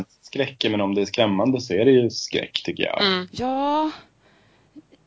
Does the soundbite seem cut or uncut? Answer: uncut